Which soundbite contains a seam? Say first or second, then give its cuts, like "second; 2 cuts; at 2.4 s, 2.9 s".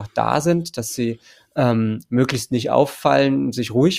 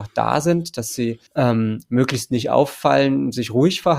second; 1 cut; at 1.3 s